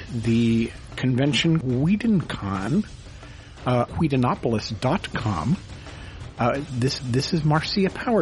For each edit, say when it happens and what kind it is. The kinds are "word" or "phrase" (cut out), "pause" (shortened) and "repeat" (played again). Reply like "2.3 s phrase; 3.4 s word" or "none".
1.6 s word; 3.9 s word; 7.0 s repeat